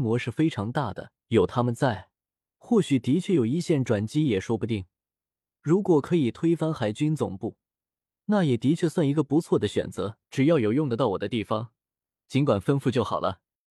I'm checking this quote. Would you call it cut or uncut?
cut